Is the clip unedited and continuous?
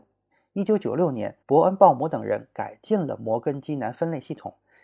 no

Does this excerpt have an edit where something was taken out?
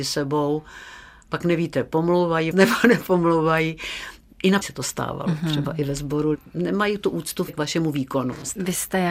yes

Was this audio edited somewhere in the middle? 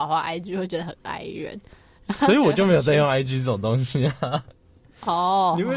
no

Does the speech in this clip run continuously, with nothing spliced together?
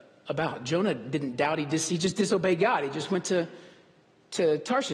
yes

